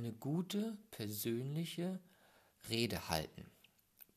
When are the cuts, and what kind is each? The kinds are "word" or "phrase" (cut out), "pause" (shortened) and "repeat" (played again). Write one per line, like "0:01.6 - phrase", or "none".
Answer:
none